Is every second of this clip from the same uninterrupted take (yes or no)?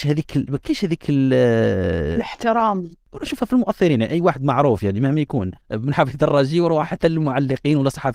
no